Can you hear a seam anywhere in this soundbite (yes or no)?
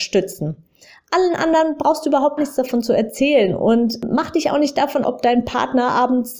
yes